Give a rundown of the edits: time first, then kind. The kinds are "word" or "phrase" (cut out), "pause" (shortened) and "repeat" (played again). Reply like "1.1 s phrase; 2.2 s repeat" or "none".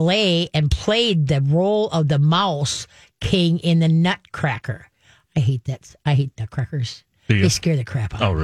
none